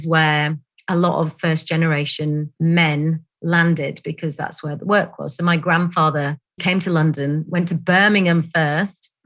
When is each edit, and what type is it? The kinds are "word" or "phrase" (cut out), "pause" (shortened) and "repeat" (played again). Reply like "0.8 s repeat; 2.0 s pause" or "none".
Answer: 2.6 s pause; 6.6 s word